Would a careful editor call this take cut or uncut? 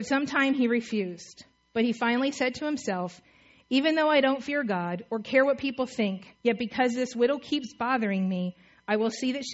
cut